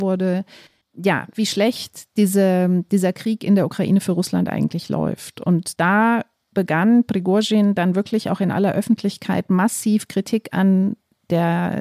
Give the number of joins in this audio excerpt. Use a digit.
0